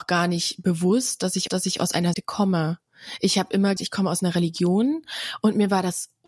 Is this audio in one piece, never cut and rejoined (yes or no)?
no